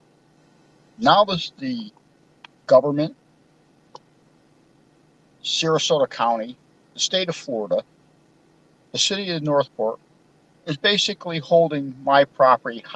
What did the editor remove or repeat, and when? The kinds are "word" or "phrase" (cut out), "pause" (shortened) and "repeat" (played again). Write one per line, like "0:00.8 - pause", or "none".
none